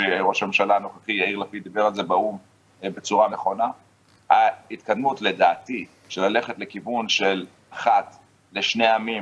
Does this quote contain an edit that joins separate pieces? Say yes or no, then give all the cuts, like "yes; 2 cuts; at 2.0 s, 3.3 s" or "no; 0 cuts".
yes; 2 cuts; at 3.3 s, 7.7 s